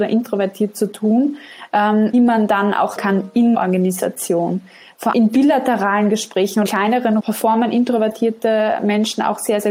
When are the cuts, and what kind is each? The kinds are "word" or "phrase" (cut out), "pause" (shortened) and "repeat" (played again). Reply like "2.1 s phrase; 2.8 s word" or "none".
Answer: 2.1 s word; 3.0 s word; 3.5 s word; 5.1 s word; 6.7 s word; 7.2 s word